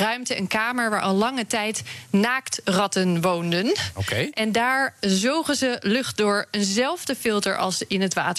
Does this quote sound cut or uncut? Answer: uncut